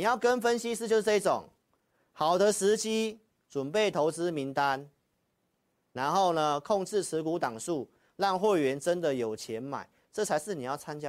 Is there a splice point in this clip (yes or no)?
no